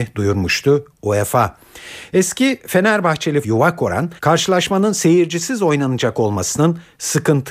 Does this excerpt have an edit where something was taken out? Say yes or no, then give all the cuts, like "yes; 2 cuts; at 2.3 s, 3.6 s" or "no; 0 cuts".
yes; 2 cuts; at 3.4 s, 4.2 s